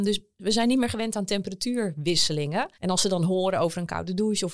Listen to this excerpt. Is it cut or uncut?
cut